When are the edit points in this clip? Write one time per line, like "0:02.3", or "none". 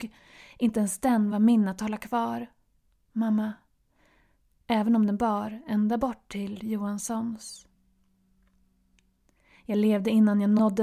none